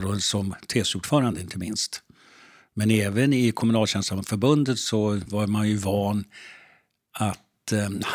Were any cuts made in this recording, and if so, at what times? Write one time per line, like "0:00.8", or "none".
none